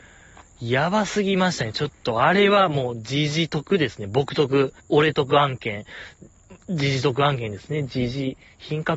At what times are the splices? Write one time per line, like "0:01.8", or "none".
0:04.8